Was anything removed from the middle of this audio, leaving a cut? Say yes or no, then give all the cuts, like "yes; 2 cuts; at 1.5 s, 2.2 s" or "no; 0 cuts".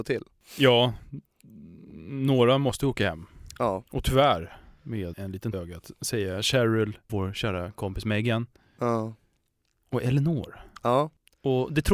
yes; 4 cuts; at 3.9 s, 5.1 s, 5.5 s, 7.1 s